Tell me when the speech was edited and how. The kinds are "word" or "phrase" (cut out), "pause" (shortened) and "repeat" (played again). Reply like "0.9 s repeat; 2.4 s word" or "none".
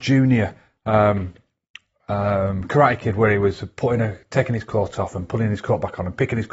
none

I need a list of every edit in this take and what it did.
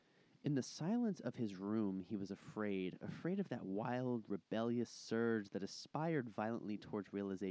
none

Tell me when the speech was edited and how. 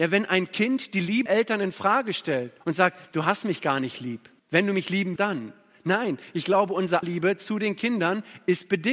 1.3 s word; 2.6 s pause; 3.1 s pause; 4.4 s pause; 5.2 s word; 7.0 s word

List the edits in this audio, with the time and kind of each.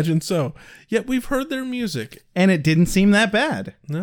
none

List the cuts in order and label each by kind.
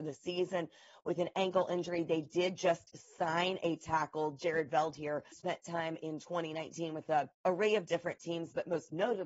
5.3 s word; 7.4 s pause

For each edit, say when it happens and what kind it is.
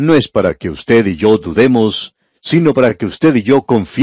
none

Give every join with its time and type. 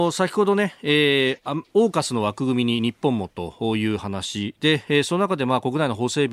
1.7 s pause

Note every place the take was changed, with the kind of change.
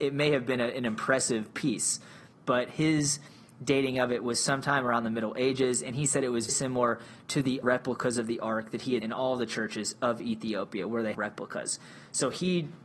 6.5 s word; 7.6 s word; 9.0 s word; 11.1 s word

